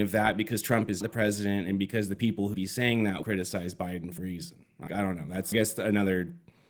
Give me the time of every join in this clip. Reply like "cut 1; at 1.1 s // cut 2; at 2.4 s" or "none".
cut 1; at 1.0 s // cut 2; at 2.5 s // cut 3; at 3.2 s // cut 4; at 4.2 s // cut 5; at 4.9 s // cut 6; at 5.5 s